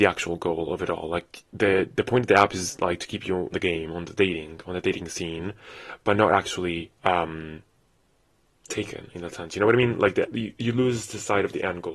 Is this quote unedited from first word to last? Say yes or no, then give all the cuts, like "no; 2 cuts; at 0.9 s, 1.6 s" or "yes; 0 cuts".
no; 3 cuts; at 3.5 s, 7.0 s, 10.2 s